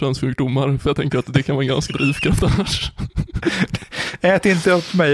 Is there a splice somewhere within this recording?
yes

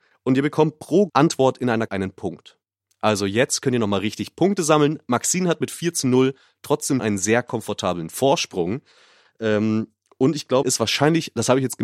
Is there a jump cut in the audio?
yes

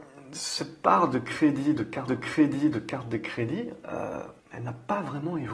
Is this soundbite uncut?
no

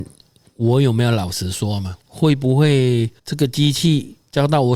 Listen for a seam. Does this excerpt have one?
yes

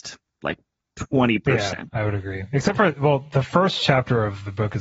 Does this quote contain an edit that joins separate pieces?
no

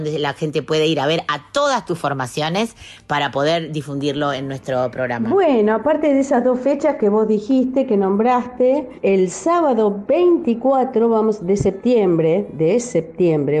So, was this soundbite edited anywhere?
no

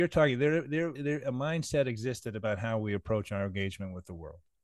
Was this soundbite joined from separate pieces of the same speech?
yes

